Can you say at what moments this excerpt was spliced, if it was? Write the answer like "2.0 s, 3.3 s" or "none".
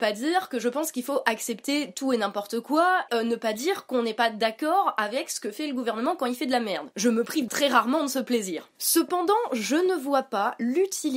3.1 s, 7.5 s